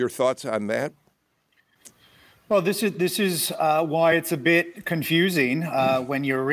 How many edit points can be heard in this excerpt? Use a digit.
0